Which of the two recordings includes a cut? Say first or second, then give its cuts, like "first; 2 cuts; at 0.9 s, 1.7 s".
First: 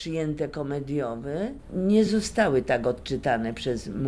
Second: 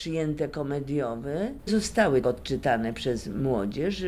second; 2 cuts; at 1.7 s, 2.2 s